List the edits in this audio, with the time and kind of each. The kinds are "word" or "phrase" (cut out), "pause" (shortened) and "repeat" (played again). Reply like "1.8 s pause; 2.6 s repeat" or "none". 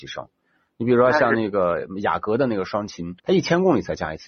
3.2 s pause